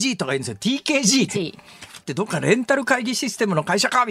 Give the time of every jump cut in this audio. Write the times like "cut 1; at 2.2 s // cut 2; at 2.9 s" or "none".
cut 1; at 1.3 s // cut 2; at 2.0 s